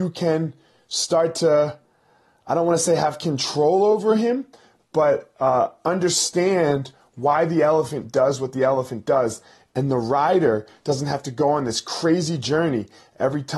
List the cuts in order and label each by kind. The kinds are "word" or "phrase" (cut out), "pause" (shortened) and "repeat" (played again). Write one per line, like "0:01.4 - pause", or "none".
none